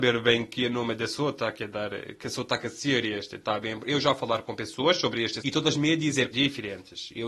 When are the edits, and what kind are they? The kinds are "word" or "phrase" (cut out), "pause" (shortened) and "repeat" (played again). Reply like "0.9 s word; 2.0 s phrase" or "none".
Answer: 5.4 s word; 6.3 s word